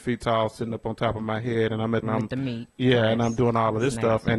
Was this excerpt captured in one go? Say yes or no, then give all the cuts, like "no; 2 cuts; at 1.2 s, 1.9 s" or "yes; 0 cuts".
no; 1 cut; at 2.0 s